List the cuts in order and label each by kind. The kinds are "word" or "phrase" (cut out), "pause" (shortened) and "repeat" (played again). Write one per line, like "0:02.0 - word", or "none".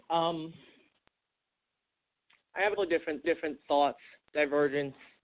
0:02.8 - word
0:03.2 - repeat